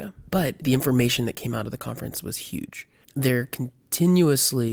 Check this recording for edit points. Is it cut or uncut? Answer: uncut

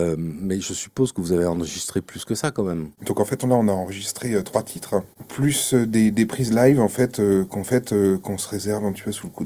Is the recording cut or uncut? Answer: cut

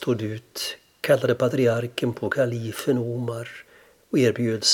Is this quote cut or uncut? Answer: uncut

